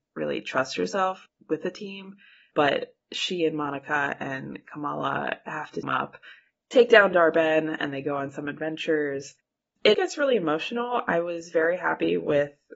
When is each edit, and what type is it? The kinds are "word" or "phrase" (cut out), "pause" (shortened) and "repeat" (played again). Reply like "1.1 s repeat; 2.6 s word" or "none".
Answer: 1.3 s word; 5.8 s word; 6.6 s word; 9.9 s word